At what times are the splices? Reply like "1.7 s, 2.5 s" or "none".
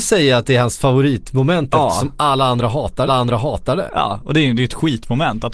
3.1 s